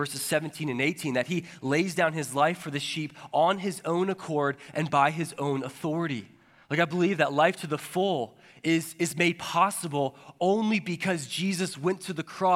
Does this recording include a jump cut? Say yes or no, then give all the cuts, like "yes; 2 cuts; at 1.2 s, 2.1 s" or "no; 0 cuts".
no; 0 cuts